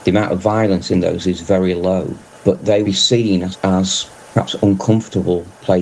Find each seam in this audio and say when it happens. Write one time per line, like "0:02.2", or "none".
0:01.2
0:02.8
0:03.5